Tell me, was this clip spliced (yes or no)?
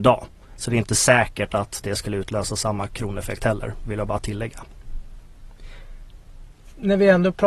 no